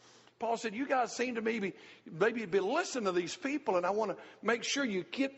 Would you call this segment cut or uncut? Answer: uncut